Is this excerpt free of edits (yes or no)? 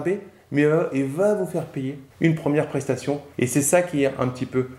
no